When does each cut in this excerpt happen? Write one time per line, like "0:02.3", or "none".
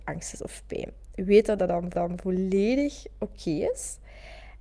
0:01.9